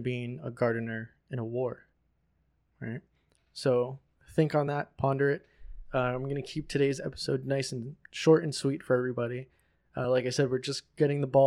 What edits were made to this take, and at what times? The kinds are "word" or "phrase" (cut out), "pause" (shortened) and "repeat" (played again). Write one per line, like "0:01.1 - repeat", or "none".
none

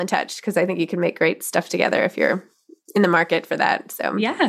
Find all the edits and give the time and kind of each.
none

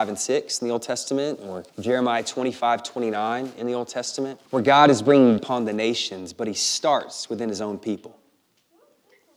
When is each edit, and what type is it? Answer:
0:01.7 - pause
0:04.5 - pause
0:05.4 - word

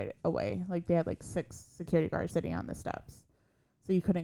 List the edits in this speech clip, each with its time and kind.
0:02.3 - word

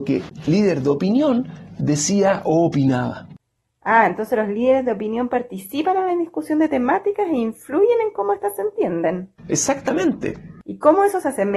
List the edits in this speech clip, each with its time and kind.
0:09.4 - pause

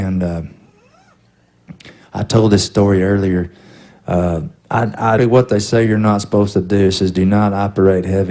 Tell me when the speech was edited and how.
0:04.6 - pause
0:05.2 - phrase

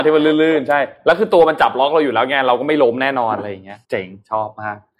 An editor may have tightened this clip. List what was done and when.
0:03.8 - pause

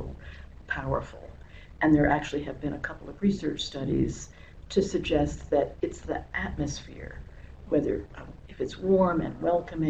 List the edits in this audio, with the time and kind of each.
none

